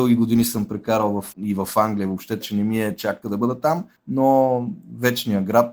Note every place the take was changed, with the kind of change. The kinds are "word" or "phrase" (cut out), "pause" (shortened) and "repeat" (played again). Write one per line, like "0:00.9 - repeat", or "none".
0:01.3 - word
0:02.4 - word
0:03.2 - phrase
0:04.0 - pause